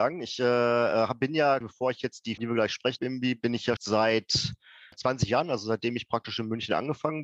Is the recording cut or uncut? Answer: cut